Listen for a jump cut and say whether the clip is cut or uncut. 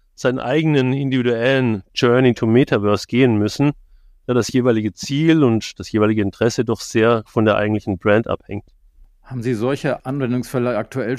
cut